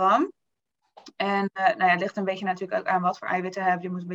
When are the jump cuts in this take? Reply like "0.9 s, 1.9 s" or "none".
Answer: none